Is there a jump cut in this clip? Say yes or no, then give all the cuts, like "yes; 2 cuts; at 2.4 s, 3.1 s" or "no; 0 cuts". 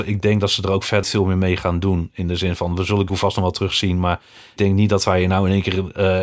yes; 3 cuts; at 1.0 s, 3.1 s, 4.6 s